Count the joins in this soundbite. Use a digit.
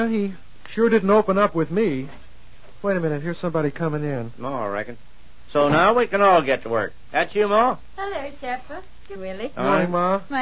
1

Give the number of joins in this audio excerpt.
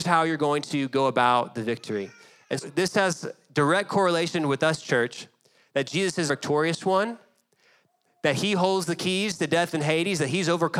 2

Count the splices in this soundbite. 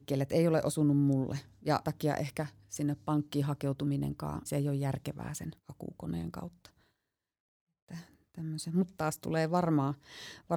4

